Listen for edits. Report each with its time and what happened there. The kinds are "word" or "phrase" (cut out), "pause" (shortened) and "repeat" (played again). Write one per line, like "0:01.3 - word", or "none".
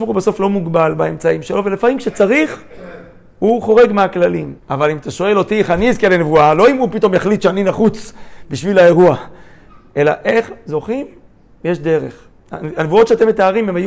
0:04.6 - pause